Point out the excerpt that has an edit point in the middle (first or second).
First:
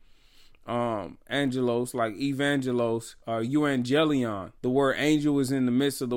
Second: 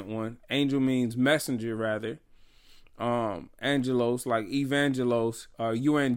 first